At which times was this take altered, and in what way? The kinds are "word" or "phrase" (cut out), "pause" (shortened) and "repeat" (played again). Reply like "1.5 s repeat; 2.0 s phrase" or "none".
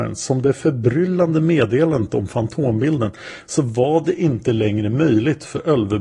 none